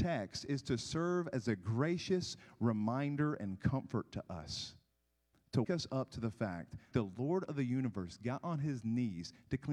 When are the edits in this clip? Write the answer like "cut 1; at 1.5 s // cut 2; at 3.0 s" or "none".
cut 1; at 5.6 s // cut 2; at 6.9 s